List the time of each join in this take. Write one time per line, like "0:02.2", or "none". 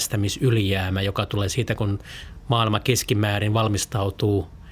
none